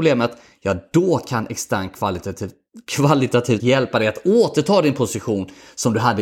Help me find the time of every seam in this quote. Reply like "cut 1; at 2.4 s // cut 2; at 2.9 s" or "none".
cut 1; at 3.6 s